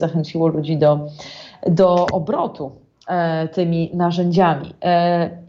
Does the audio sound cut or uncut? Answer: uncut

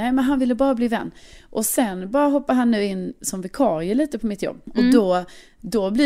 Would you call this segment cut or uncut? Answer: uncut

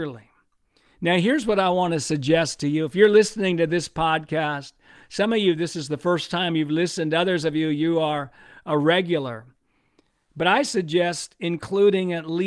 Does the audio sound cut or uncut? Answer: uncut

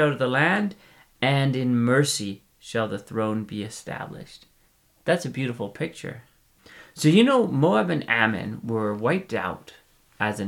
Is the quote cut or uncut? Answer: uncut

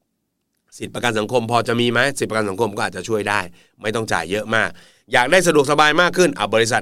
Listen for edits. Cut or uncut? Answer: uncut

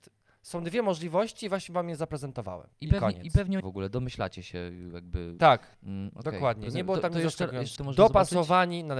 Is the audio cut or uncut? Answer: cut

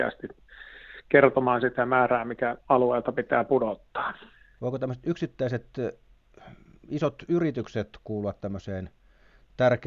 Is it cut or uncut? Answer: uncut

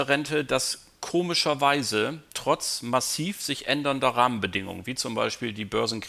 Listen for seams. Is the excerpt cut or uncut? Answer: uncut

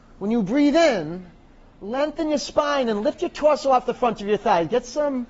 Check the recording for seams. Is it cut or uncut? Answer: uncut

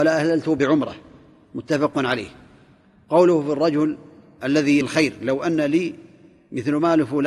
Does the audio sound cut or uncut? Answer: cut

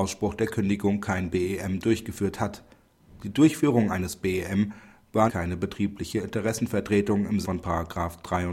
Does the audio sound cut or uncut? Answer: cut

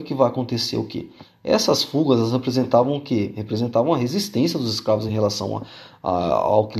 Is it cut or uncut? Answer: uncut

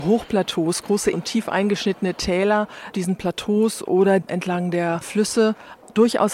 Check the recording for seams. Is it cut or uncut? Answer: cut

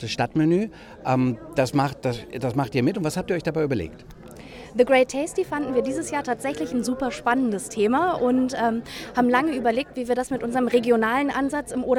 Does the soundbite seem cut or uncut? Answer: uncut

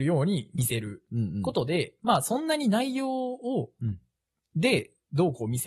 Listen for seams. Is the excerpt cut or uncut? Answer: uncut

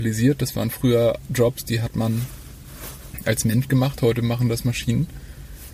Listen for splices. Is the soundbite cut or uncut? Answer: uncut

